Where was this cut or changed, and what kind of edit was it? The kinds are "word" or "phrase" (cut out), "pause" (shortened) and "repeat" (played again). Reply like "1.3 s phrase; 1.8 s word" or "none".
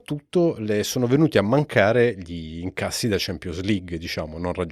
none